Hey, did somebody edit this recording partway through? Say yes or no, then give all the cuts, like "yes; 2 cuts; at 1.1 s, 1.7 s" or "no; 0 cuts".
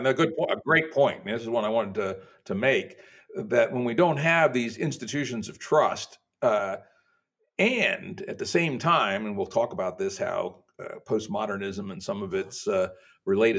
no; 0 cuts